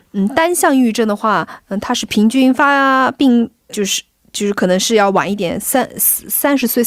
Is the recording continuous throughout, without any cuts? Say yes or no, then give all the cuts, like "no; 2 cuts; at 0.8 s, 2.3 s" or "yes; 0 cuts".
no; 1 cut; at 3.7 s